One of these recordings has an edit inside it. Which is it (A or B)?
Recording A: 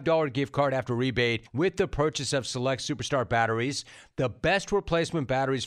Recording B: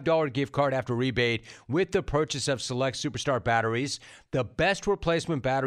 A